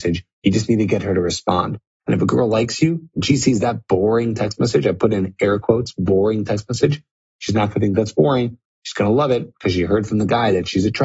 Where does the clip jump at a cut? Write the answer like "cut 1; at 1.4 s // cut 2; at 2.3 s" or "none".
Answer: none